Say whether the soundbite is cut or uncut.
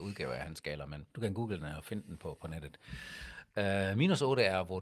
cut